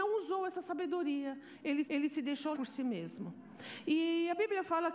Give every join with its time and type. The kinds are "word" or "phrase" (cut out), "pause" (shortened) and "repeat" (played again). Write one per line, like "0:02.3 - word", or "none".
0:01.8 - repeat
0:02.5 - word